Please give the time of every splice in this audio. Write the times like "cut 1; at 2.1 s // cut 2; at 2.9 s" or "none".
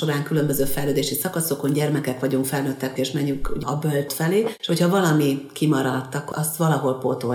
cut 1; at 3.0 s // cut 2; at 3.6 s // cut 3; at 4.1 s // cut 4; at 6.3 s

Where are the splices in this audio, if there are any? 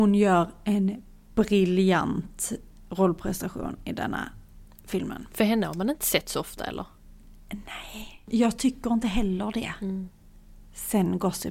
none

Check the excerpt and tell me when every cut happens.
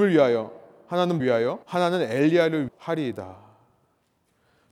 cut 1; at 1.2 s // cut 2; at 1.6 s // cut 3; at 2.7 s

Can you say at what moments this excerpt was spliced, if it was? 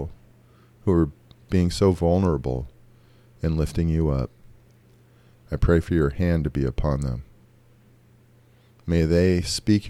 none

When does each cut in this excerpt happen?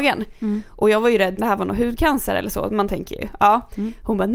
cut 1; at 1.4 s

